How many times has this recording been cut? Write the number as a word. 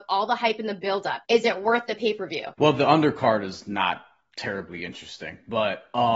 two